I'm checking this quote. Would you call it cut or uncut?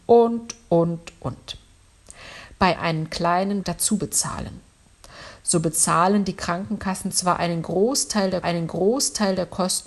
cut